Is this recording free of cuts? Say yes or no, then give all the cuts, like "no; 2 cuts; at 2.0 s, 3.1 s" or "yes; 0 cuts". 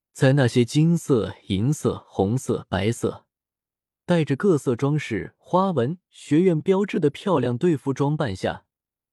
yes; 0 cuts